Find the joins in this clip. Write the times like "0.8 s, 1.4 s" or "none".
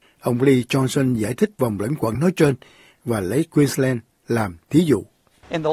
none